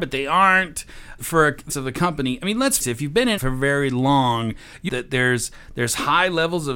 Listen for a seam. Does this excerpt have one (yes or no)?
yes